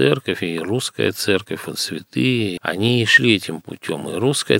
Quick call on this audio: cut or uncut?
uncut